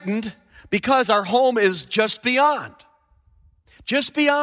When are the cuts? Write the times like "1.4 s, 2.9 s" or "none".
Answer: none